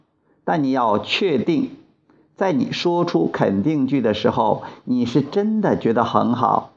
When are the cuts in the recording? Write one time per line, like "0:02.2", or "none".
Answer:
none